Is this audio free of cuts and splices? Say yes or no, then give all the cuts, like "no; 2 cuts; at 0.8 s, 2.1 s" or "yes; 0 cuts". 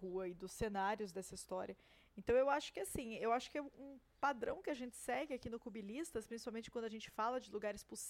yes; 0 cuts